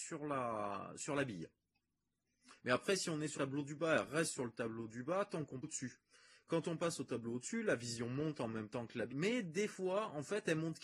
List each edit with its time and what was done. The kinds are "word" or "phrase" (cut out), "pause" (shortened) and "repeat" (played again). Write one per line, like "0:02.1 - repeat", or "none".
0:02.6 - pause
0:03.3 - word
0:05.6 - phrase
0:09.1 - word